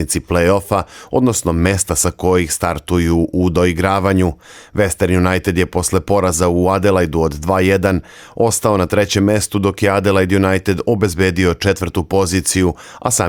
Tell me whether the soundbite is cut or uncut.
uncut